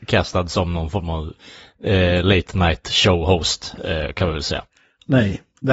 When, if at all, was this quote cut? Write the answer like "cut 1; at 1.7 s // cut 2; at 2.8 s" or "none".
none